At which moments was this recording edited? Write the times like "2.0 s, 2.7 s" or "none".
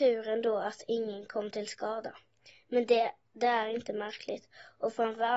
none